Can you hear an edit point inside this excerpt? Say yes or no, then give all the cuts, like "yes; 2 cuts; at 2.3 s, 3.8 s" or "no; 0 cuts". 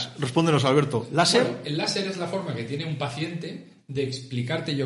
no; 0 cuts